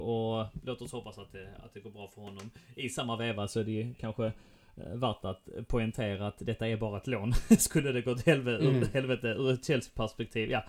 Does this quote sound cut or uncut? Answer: uncut